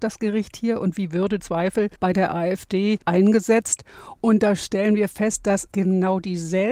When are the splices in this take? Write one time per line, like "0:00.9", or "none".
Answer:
0:01.4
0:02.0
0:03.0
0:05.7